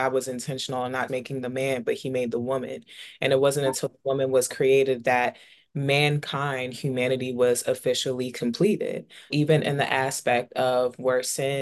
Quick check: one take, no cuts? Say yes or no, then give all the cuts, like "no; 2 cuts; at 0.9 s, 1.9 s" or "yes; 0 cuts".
no; 2 cuts; at 1.1 s, 9.3 s